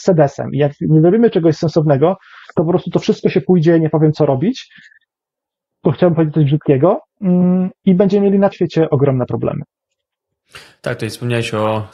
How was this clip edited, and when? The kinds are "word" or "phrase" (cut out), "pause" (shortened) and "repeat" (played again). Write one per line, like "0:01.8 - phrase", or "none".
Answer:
0:08.5 - word